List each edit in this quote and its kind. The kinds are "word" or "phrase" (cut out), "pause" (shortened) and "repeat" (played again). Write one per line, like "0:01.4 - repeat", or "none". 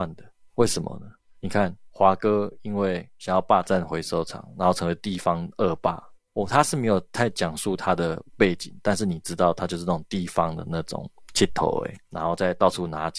0:08.3 - pause

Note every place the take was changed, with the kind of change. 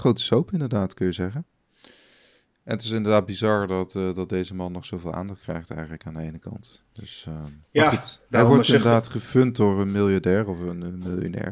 none

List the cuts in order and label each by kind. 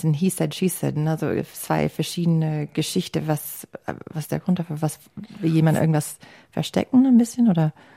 none

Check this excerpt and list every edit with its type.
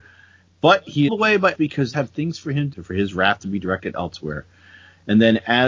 0:01.1 - phrase
0:01.5 - word
0:01.9 - phrase
0:02.7 - phrase

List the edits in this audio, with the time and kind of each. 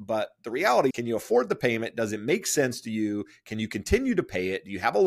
0:00.9 - word

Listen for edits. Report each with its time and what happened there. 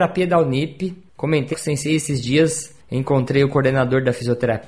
0:01.5 - word

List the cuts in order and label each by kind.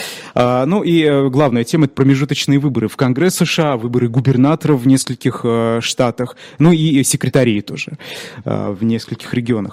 none

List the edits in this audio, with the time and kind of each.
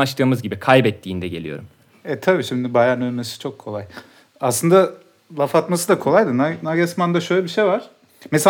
none

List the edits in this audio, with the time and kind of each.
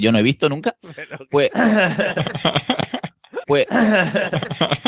0:03.4 - repeat

